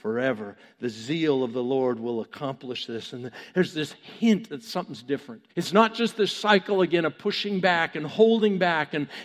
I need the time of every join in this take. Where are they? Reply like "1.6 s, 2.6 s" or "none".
5.5 s